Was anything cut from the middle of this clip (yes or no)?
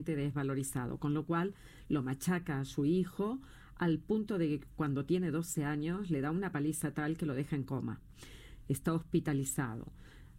no